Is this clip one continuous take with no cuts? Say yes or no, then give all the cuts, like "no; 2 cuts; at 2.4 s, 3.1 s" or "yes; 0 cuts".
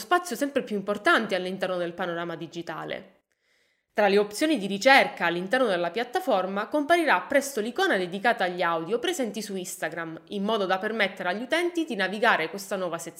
yes; 0 cuts